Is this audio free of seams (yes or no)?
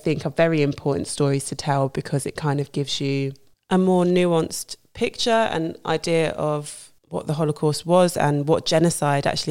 no